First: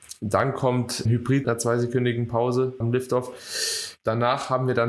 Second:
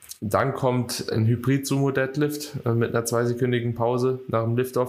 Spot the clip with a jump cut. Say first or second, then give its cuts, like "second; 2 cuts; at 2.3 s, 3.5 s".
first; 3 cuts; at 1.1 s, 1.4 s, 2.8 s